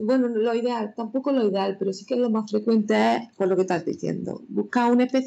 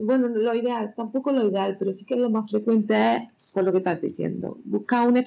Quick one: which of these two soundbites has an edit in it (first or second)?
first